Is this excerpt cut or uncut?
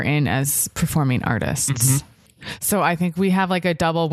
uncut